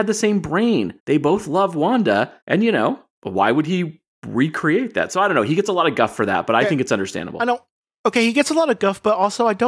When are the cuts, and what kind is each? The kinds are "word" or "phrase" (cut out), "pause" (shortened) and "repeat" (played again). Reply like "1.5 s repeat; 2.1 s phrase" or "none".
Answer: 1.0 s pause; 2.4 s pause; 3.1 s pause